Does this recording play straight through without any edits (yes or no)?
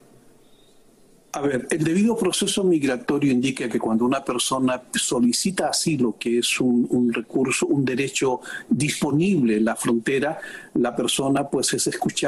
yes